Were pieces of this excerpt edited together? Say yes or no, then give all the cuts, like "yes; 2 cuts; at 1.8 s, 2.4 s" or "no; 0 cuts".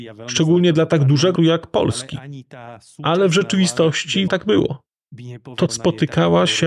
yes; 3 cuts; at 1.4 s, 4.3 s, 5.7 s